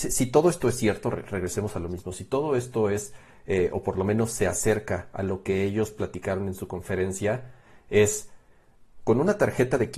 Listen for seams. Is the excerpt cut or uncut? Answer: uncut